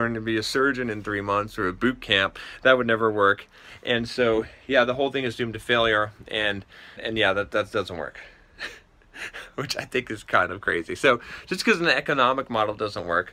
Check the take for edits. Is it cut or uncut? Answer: cut